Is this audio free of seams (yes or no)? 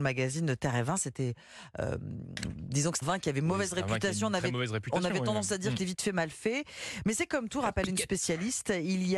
no